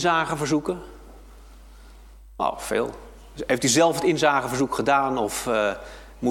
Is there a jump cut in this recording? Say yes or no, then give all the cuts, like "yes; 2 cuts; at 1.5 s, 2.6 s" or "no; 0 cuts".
no; 0 cuts